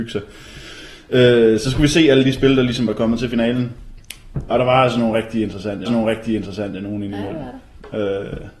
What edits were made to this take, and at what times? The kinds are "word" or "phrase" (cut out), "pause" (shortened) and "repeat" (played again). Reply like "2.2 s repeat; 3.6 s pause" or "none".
4.5 s word; 5.9 s repeat